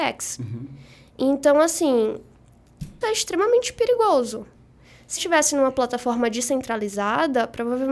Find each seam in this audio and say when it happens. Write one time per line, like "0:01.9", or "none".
0:03.0
0:05.2